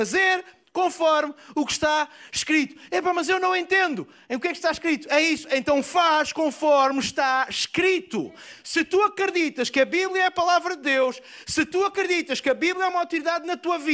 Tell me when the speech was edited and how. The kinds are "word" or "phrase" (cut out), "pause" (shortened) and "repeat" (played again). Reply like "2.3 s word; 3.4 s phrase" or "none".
none

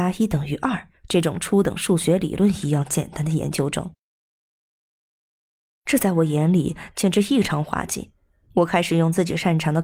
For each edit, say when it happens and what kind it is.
none

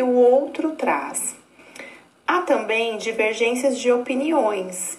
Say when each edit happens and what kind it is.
none

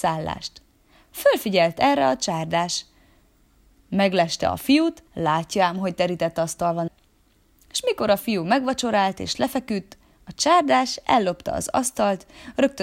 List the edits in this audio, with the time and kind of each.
5.1 s pause; 6.9 s word

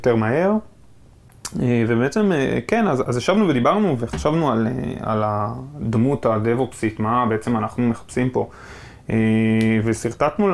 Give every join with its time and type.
3.0 s word

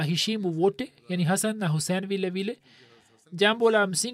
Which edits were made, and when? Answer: none

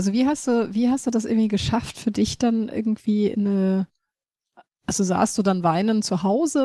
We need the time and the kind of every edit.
none

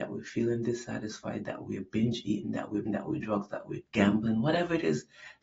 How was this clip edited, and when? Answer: 2.9 s phrase; 3.2 s word; 3.9 s pause

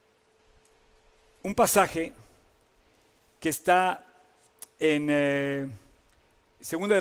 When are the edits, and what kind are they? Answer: none

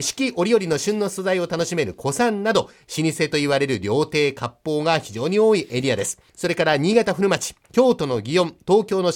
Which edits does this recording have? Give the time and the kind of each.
6.3 s pause

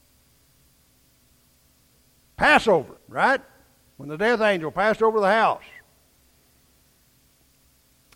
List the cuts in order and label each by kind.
3.0 s pause

